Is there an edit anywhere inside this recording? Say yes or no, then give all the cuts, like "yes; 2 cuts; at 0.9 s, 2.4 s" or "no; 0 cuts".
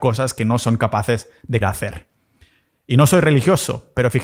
yes; 1 cut; at 1.6 s